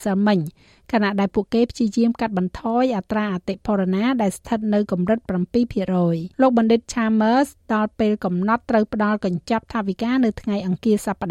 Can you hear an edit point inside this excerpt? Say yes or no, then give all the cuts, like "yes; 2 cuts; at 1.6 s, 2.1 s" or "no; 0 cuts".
yes; 1 cut; at 6.3 s